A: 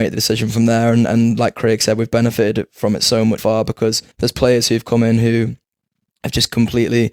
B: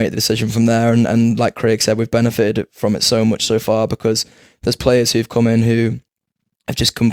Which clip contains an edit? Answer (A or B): A